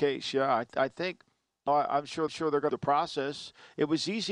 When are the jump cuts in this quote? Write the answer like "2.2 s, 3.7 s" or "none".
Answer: 1.7 s, 2.3 s, 2.7 s